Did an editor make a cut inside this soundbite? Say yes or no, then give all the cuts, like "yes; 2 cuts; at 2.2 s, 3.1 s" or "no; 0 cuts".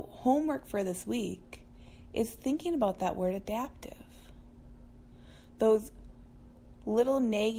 no; 0 cuts